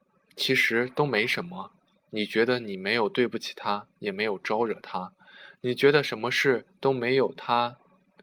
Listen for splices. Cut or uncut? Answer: uncut